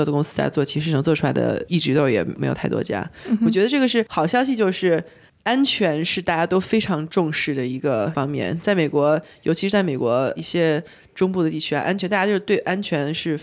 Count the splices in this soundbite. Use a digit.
1